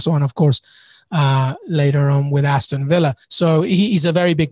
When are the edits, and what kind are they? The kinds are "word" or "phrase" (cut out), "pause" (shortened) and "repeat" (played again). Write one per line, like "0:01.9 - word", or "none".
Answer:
0:03.2 - pause